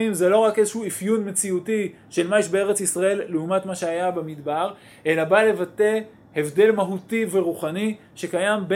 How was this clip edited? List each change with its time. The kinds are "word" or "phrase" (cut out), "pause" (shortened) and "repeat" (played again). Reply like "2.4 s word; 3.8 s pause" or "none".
none